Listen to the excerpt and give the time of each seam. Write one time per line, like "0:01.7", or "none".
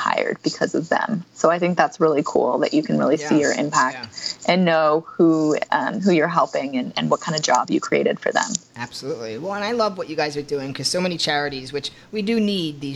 none